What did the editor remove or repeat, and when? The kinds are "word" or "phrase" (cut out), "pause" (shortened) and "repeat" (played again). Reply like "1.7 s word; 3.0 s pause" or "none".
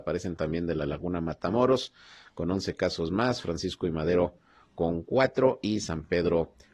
none